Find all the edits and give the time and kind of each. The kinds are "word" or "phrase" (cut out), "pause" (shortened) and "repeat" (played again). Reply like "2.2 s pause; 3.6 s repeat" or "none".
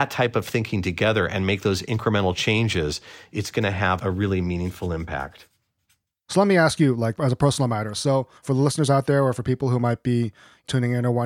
8.4 s pause